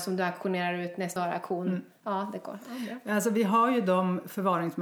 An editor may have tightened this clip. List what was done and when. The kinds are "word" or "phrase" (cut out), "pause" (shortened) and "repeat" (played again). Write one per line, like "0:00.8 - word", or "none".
0:01.2 - phrase